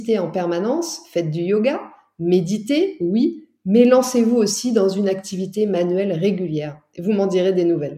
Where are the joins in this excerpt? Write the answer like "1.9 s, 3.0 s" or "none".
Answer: none